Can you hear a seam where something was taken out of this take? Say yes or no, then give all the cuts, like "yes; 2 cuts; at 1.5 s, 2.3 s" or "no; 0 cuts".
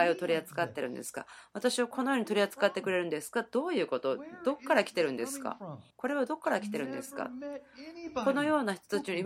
yes; 1 cut; at 5.9 s